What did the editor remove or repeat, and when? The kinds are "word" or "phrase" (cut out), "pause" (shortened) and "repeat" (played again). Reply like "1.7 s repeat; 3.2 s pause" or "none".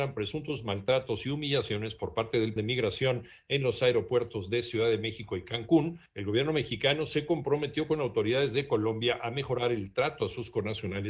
2.6 s word; 6.1 s pause